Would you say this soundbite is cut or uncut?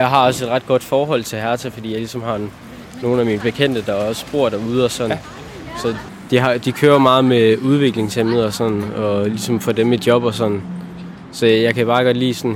uncut